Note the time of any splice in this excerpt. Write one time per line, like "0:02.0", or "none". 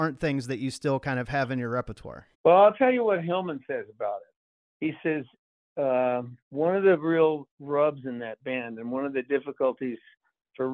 0:02.3
0:04.6
0:06.4